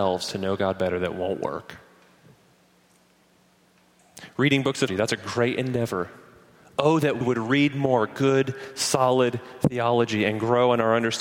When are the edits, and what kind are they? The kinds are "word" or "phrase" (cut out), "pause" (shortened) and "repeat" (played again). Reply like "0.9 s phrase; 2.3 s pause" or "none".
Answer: 4.9 s word; 7.2 s word